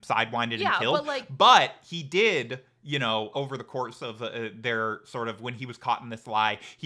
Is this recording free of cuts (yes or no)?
no